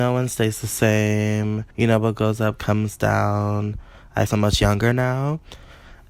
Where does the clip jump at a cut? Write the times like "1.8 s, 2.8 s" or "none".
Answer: 1.7 s, 4.3 s